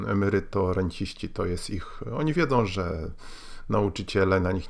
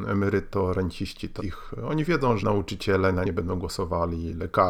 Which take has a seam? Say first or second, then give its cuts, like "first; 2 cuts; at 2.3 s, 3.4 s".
second; 3 cuts; at 1.4 s, 2.4 s, 3.2 s